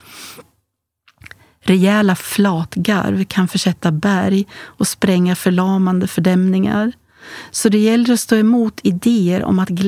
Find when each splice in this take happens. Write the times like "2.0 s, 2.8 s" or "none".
none